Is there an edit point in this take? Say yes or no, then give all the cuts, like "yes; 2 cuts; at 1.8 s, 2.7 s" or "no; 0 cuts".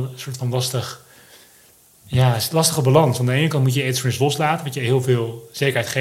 no; 0 cuts